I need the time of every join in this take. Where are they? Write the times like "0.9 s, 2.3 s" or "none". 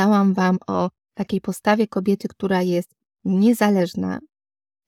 none